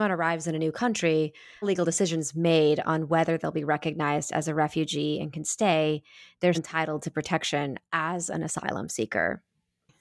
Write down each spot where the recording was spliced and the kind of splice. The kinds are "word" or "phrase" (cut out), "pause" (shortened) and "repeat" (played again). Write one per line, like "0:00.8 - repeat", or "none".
0:01.6 - word
0:06.5 - word